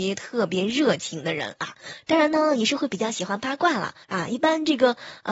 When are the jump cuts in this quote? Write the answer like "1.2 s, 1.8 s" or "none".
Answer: 4.0 s